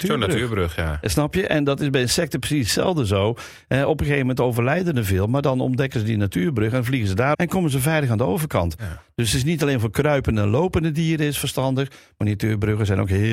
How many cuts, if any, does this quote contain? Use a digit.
1